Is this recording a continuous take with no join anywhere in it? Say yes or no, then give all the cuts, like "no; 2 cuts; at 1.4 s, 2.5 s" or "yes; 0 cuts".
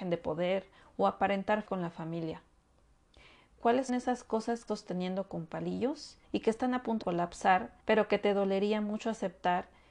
no; 6 cuts; at 1.7 s, 3.9 s, 4.7 s, 6.2 s, 7.0 s, 7.8 s